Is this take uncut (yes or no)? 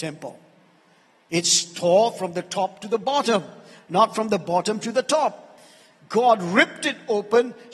yes